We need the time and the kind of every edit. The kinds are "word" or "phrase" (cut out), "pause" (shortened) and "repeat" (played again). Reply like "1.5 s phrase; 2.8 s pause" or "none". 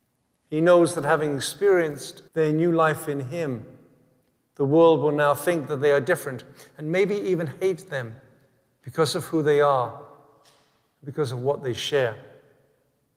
2.3 s pause

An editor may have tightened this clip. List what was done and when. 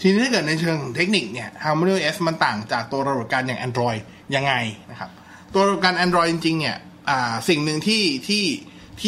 none

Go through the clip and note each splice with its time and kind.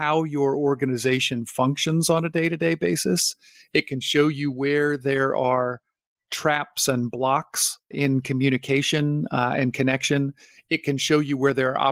none

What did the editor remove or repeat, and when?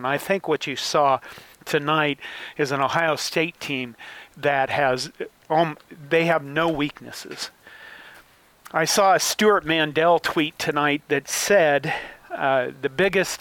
none

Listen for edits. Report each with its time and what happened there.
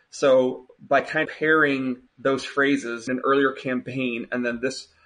1.2 s word; 2.1 s pause; 3.1 s phrase

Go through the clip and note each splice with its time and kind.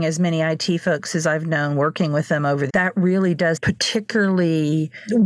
2.7 s word; 3.6 s phrase

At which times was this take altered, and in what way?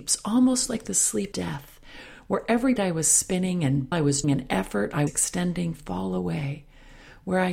1.3 s word; 2.8 s word; 3.9 s word; 4.2 s word; 5.1 s word; 5.7 s word

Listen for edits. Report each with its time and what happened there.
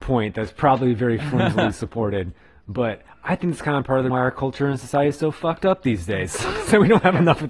4.1 s word

